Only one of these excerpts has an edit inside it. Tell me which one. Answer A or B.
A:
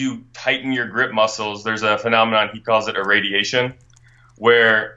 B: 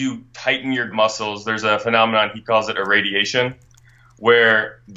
B